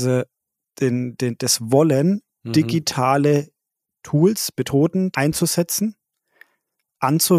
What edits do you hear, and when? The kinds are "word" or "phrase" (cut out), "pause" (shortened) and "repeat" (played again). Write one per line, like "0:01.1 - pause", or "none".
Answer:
0:05.1 - word